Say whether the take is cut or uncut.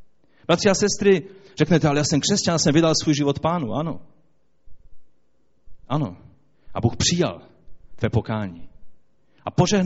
uncut